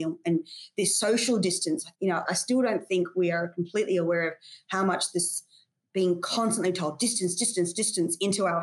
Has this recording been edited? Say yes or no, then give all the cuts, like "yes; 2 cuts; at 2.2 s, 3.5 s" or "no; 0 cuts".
no; 0 cuts